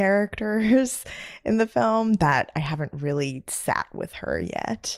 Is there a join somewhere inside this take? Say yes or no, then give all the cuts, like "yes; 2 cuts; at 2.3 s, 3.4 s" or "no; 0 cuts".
no; 0 cuts